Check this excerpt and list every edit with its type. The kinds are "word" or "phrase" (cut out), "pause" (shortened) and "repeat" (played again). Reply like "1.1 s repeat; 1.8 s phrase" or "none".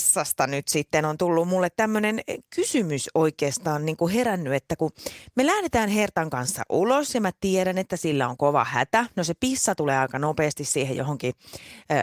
none